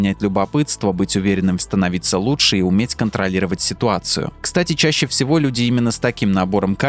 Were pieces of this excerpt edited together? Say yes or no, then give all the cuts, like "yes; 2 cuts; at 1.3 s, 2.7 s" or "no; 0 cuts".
yes; 1 cut; at 1.6 s